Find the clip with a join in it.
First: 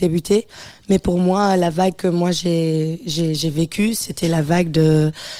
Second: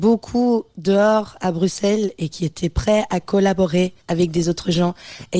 second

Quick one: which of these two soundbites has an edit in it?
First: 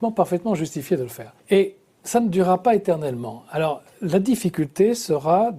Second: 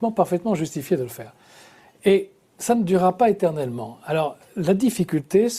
first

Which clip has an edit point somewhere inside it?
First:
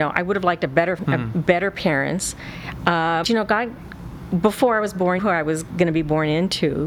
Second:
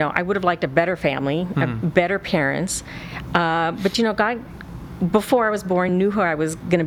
first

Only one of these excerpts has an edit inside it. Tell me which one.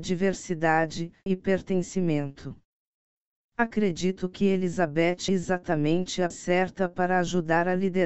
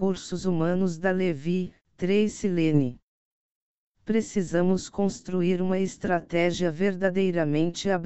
first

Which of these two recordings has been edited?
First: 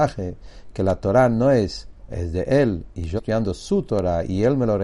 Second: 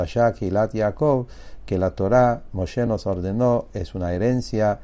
first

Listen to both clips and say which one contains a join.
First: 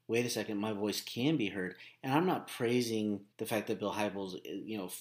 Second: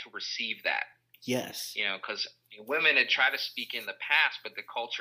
first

